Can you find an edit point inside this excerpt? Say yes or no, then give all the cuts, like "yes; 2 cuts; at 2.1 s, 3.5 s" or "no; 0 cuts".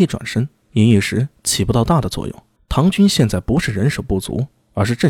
yes; 1 cut; at 2.6 s